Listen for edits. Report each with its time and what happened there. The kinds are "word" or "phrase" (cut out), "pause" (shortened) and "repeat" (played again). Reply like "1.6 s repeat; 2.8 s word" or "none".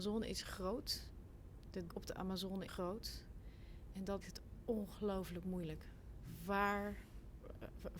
1.9 s word; 2.7 s word; 4.2 s word